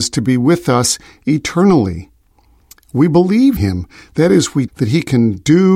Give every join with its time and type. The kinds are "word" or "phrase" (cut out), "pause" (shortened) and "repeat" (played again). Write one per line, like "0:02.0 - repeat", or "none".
0:03.6 - word
0:04.7 - word